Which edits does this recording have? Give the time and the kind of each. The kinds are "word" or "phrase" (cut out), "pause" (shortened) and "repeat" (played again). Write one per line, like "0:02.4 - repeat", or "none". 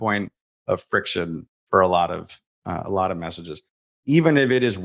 none